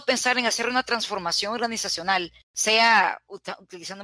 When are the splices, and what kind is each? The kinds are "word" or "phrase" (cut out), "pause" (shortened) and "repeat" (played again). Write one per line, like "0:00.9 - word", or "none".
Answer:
0:02.4 - pause